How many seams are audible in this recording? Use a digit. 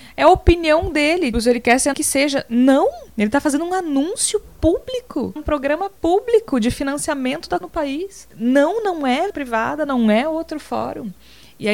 8